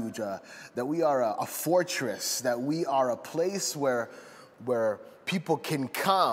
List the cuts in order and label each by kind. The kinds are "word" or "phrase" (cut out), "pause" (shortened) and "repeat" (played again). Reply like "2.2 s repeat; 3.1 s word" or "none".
none